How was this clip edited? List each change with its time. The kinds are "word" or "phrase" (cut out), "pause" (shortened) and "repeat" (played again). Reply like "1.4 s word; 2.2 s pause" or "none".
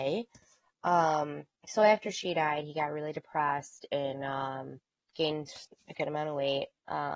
1.6 s pause; 5.1 s word

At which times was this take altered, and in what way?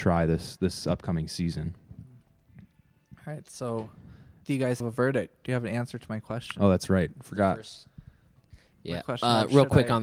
4.4 s word; 4.8 s phrase

